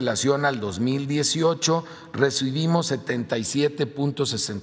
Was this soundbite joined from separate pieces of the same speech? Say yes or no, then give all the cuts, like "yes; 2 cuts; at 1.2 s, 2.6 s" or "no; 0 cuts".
no; 0 cuts